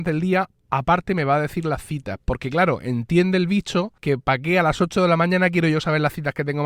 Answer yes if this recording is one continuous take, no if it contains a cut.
no